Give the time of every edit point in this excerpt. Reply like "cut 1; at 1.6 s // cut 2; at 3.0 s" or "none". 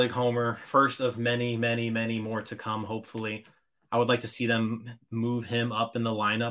none